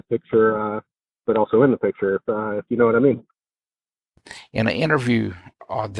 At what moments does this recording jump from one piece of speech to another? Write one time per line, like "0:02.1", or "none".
none